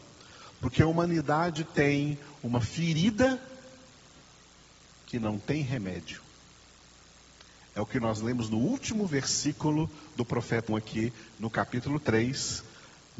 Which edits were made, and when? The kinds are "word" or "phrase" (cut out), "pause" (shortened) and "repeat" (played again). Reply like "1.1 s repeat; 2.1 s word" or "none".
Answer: 10.7 s word

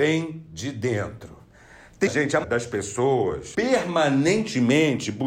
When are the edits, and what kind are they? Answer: 2.1 s word; 2.4 s word; 3.5 s word

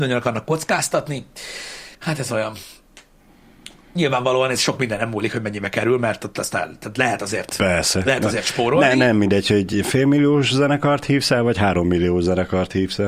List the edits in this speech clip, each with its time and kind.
1.9 s pause

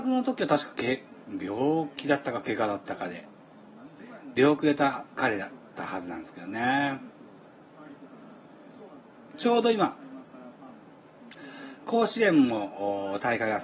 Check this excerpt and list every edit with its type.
5.1 s pause

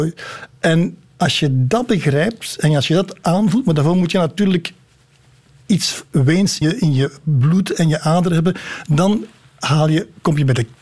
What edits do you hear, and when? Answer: 6.6 s word

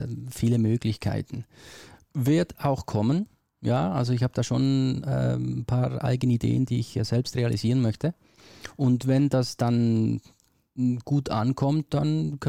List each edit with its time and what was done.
none

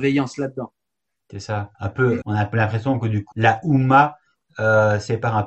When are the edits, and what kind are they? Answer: 1.7 s pause; 2.2 s word; 3.3 s word

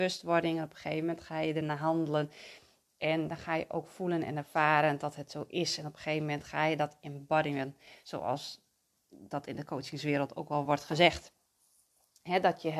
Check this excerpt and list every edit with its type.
none

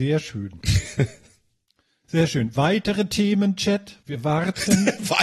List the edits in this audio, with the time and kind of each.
4.0 s pause

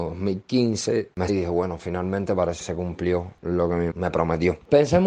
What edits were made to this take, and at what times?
1.3 s word; 2.6 s word; 3.9 s word

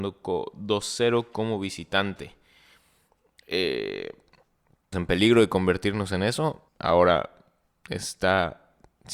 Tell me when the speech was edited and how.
4.9 s word; 6.7 s pause

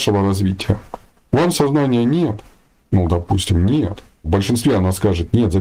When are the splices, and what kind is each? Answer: 1.5 s word; 4.2 s word

